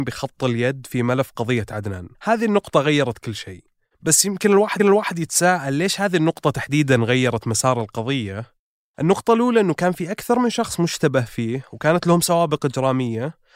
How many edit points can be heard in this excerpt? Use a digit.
2